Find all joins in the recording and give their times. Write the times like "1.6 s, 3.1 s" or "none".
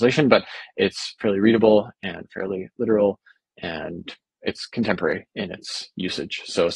4.4 s